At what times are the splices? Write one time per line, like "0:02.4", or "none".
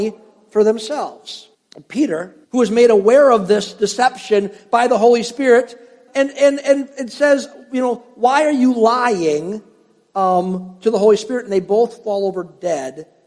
0:01.5
0:02.4
0:06.1